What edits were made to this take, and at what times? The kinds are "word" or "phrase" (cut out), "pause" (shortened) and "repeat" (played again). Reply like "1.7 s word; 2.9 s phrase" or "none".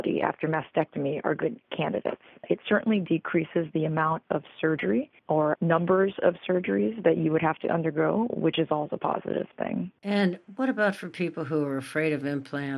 5.2 s pause; 10.0 s pause